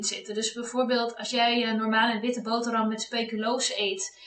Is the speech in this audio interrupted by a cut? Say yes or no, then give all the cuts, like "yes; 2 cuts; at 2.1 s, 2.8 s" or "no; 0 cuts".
no; 0 cuts